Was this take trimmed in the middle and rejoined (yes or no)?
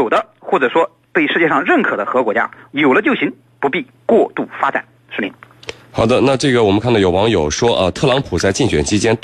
yes